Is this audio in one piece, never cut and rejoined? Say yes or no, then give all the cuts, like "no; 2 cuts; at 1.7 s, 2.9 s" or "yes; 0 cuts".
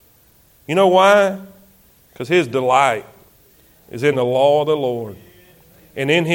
yes; 0 cuts